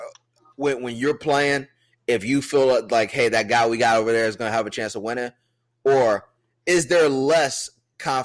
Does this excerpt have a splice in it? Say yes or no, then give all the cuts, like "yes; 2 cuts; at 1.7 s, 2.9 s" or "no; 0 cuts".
no; 0 cuts